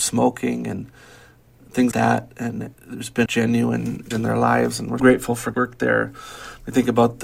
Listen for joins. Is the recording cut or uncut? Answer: cut